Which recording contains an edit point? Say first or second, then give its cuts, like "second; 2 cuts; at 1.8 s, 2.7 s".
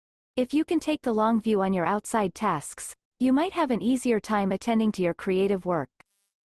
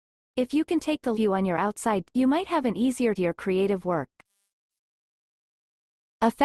second; 3 cuts; at 1.1 s, 2.0 s, 3.2 s